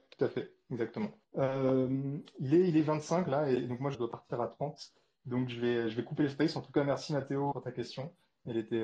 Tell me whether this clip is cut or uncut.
cut